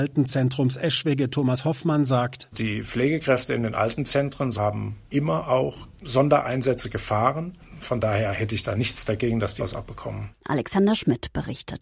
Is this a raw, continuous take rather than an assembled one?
no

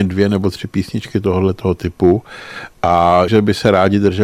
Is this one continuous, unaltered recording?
no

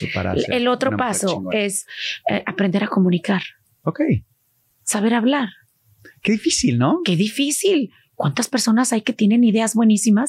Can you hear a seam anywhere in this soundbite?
no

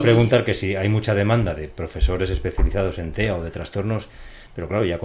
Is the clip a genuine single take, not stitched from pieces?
yes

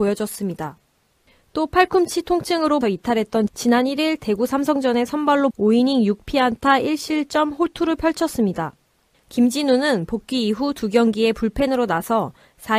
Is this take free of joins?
no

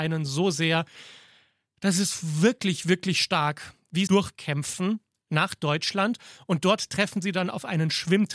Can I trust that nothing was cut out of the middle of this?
no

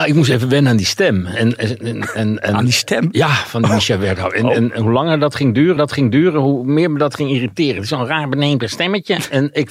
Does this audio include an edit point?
yes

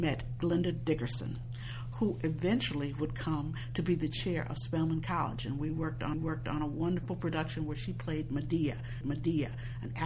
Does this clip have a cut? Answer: yes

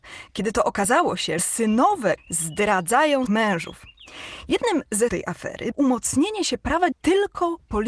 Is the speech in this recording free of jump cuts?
no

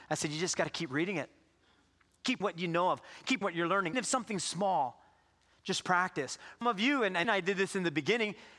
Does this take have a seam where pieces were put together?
yes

